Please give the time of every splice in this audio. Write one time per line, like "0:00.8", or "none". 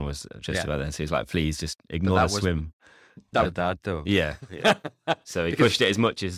0:03.4